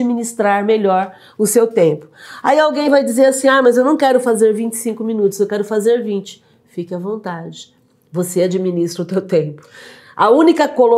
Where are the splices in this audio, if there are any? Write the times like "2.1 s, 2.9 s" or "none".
none